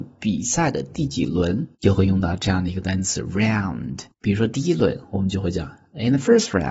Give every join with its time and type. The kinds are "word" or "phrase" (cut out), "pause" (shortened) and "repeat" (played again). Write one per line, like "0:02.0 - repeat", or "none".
0:01.7 - pause
0:04.1 - pause